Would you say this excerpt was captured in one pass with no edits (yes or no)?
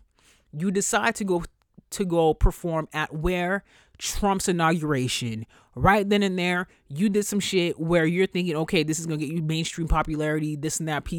yes